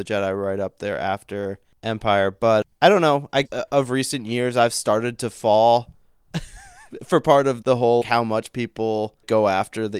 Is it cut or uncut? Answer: cut